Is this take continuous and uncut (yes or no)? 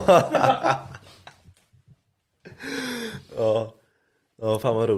yes